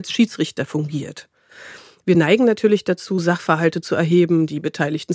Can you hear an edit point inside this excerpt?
no; 0 cuts

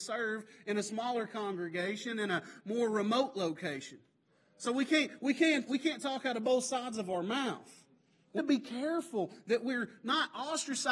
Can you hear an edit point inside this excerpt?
yes; 2 cuts; at 5.7 s, 8.4 s

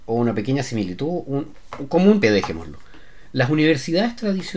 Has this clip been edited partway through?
yes; 1 cut; at 2.2 s

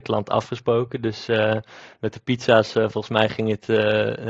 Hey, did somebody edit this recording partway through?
no; 0 cuts

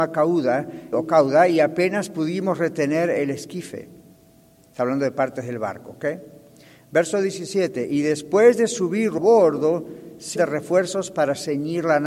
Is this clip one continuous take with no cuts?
no; 3 cuts; at 0.9 s, 9.2 s, 10.4 s

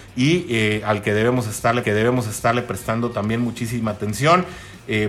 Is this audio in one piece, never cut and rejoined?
no; 1 cut; at 1.8 s

